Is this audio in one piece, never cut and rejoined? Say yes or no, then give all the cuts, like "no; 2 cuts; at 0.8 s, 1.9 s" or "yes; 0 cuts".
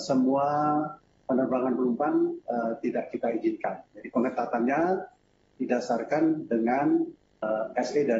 yes; 0 cuts